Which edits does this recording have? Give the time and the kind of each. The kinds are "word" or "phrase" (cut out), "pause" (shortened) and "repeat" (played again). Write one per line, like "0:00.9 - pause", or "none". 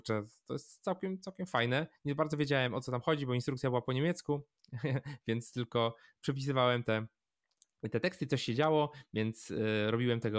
none